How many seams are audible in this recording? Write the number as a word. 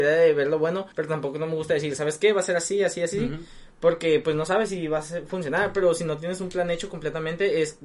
one